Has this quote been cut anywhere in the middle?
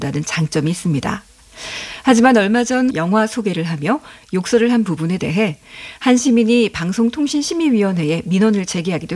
yes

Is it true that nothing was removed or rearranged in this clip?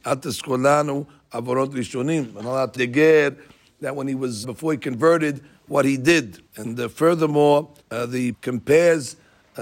no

